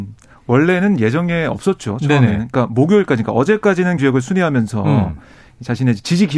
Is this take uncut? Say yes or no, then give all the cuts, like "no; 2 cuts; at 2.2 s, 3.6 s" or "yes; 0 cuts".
no; 1 cut; at 4.0 s